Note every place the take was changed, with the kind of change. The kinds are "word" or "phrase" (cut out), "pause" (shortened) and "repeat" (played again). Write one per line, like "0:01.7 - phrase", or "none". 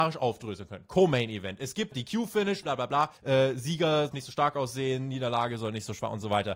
0:01.9 - word
0:02.6 - word
0:03.2 - pause
0:04.1 - word